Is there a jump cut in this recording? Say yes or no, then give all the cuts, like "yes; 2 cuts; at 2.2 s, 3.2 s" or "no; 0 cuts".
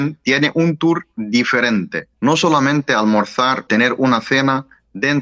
yes; 2 cuts; at 2.1 s, 3.7 s